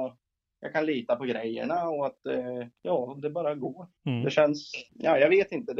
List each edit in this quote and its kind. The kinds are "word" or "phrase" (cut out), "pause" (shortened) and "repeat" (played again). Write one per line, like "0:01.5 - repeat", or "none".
0:02.8 - pause
0:04.0 - pause
0:04.9 - pause